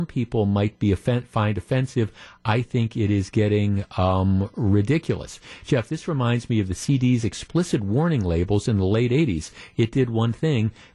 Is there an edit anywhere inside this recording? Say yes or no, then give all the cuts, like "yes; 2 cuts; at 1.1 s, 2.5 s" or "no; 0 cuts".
no; 0 cuts